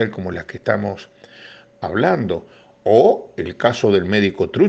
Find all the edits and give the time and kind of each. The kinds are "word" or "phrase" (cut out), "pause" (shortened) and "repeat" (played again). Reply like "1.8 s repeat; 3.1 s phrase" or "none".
none